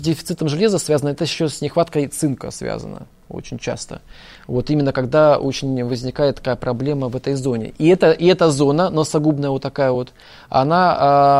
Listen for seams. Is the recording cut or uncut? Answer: uncut